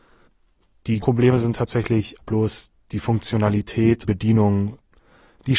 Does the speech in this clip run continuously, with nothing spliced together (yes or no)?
no